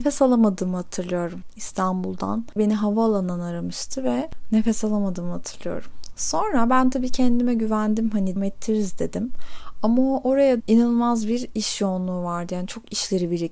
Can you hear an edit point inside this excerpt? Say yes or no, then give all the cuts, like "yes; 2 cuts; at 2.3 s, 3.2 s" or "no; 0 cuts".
yes; 3 cuts; at 2.6 s, 8.4 s, 10.6 s